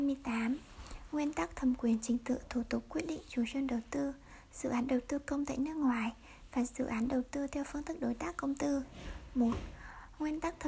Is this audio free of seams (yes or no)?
yes